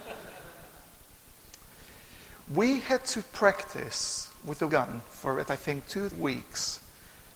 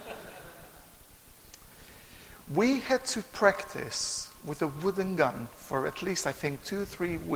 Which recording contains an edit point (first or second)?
first